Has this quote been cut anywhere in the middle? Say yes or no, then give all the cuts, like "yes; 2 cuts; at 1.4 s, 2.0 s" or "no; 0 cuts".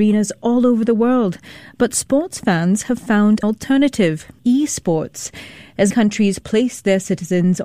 yes; 2 cuts; at 3.4 s, 5.9 s